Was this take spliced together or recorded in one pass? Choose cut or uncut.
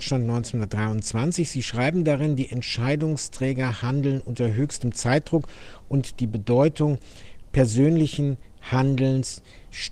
uncut